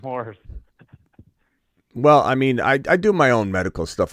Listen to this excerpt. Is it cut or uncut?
uncut